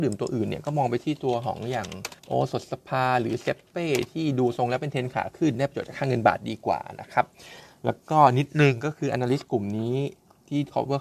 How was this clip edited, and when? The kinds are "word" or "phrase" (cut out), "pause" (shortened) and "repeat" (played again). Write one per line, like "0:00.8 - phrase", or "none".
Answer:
0:02.2 - pause

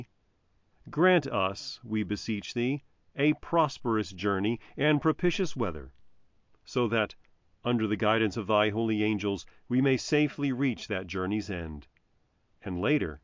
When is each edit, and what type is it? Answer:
none

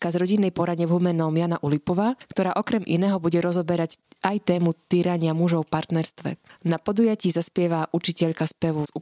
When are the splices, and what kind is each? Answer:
none

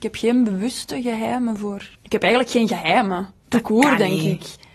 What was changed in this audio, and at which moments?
0:01.9 - pause
0:03.4 - pause

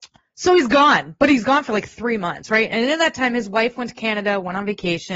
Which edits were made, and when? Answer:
none

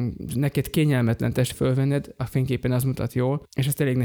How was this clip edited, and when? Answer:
0:01.5 - phrase

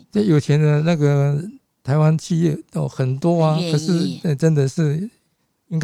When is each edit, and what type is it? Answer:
none

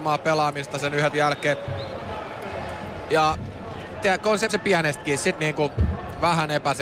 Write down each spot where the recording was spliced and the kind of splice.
0:01.1 - word
0:03.9 - word
0:04.5 - word
0:05.4 - word

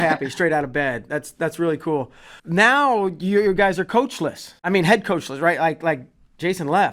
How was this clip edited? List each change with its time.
0:02.4 - pause
0:04.6 - pause

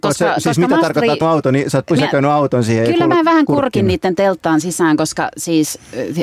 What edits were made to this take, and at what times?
0:01.2 - phrase

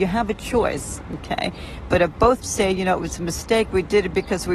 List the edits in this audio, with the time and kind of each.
0:02.4 - word

